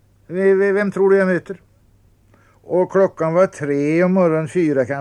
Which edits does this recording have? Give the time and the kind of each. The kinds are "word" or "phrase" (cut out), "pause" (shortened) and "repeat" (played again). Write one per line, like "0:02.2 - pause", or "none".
none